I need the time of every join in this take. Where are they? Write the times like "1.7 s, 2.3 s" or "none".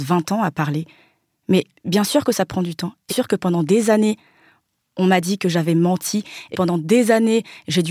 3.1 s, 6.5 s